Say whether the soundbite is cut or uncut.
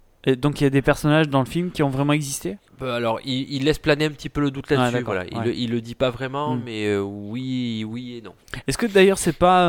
cut